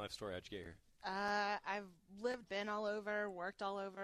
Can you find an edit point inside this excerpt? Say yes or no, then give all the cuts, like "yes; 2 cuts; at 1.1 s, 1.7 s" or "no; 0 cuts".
yes; 1 cut; at 2.4 s